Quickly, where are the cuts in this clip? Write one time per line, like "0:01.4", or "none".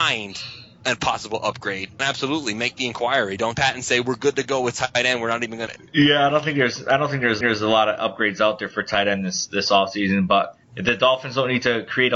0:02.0
0:03.5
0:05.7
0:07.4
0:10.6